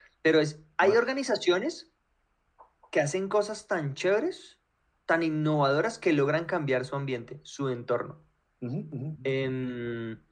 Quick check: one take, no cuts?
no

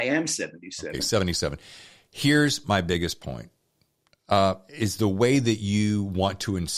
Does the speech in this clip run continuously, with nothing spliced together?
yes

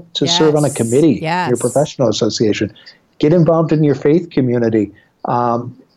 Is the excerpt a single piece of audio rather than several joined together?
yes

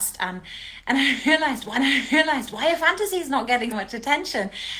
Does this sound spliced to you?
yes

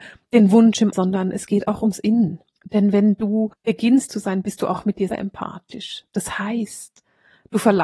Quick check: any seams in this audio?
yes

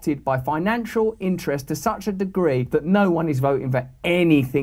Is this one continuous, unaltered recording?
yes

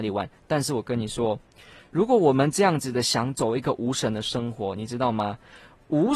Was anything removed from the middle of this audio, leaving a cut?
no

